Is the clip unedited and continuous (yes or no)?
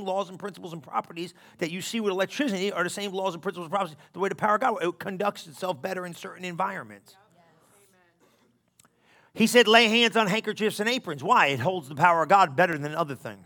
yes